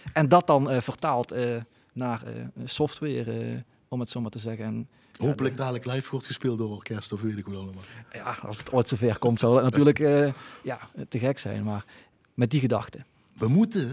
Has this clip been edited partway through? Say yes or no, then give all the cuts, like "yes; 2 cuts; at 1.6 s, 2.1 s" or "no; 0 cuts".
no; 0 cuts